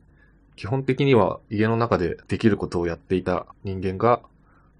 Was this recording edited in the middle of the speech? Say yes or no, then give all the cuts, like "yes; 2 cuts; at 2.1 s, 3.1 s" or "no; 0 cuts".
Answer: yes; 3 cuts; at 1.4 s, 2.2 s, 3.5 s